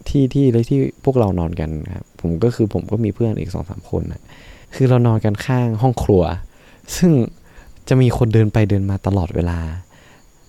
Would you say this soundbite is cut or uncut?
cut